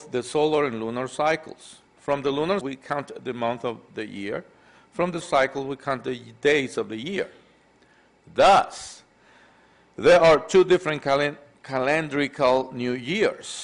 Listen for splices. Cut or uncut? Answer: cut